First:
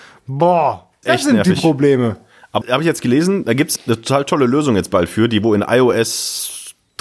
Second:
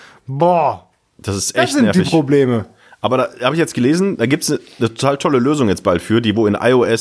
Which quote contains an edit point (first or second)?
first